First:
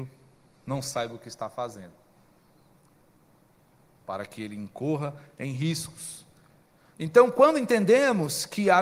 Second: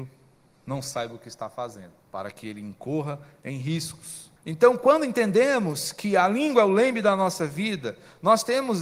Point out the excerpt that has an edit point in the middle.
second; 2 cuts; at 2.0 s, 4.4 s

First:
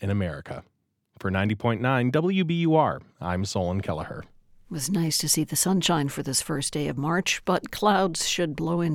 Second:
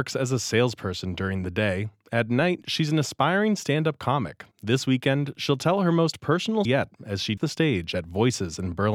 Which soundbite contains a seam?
second; 3 cuts; at 4.5 s, 6.6 s, 7.4 s

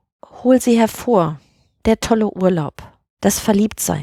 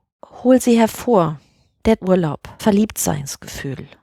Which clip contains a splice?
second; 2 cuts; at 2.0 s, 2.6 s

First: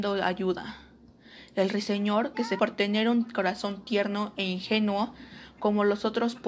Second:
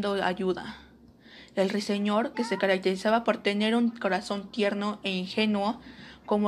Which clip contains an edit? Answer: first; 1 cut; at 2.6 s

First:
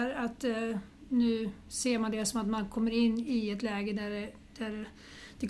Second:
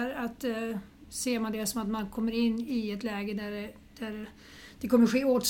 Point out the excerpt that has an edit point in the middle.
second; 1 cut; at 1.0 s

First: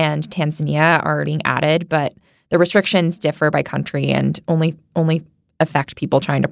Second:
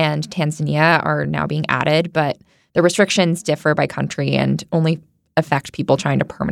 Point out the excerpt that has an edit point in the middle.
first; 2 cuts; at 1.2 s, 4.9 s

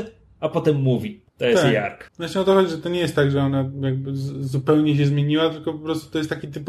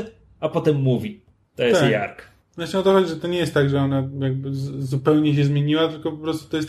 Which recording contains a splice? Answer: first; 2 cuts; at 1.3 s, 2.1 s

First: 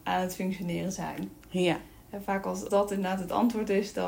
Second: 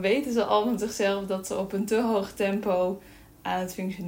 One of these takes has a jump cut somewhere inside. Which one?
first; 1 cut; at 2.7 s

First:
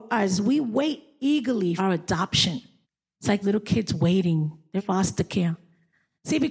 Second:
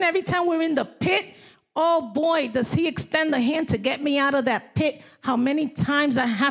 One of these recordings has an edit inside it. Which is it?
first; 4 cuts; at 1.8 s, 2.8 s, 3.4 s, 4.8 s

